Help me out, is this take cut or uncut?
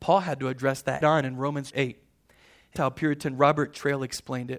cut